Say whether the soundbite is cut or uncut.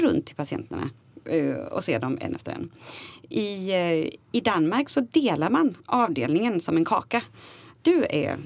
cut